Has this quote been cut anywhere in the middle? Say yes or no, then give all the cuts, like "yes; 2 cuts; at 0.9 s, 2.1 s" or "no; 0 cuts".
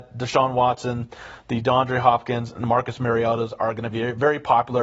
no; 0 cuts